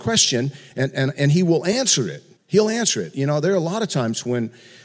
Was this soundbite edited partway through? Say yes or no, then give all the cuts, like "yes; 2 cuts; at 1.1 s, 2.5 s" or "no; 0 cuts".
no; 0 cuts